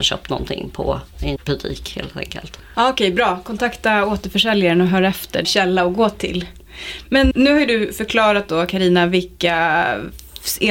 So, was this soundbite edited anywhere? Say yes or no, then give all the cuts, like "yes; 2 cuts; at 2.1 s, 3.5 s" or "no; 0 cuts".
yes; 3 cuts; at 1.4 s, 5.4 s, 7.3 s